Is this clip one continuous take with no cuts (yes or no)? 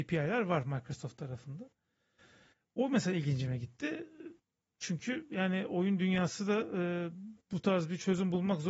yes